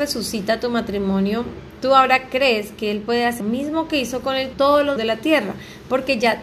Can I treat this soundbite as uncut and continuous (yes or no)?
no